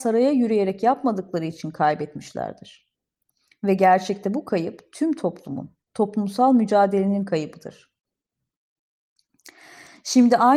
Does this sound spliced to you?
no; 0 cuts

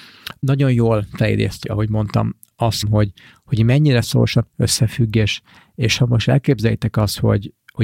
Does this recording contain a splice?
yes; 2 cuts; at 1.6 s, 2.8 s

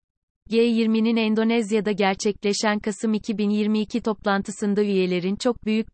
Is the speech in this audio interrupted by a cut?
no; 0 cuts

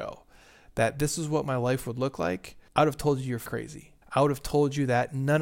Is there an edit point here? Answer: yes; 3 cuts; at 2.7 s, 3.5 s, 4.0 s

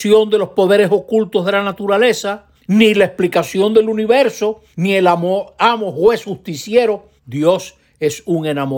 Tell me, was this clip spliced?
yes; 3 cuts; at 2.5 s, 4.7 s, 7.2 s

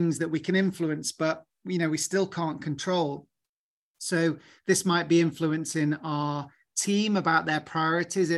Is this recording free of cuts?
yes; 0 cuts

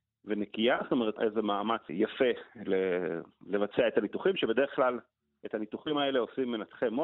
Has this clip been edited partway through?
yes; 2 cuts; at 1.2 s, 1.9 s

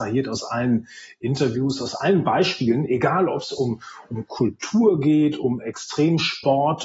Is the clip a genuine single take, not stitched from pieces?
yes; 0 cuts

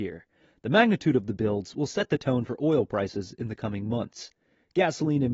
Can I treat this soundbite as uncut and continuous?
yes; 0 cuts

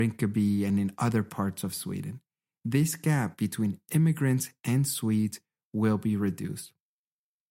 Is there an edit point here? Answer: no; 0 cuts

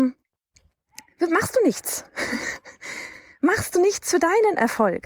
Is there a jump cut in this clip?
no; 0 cuts

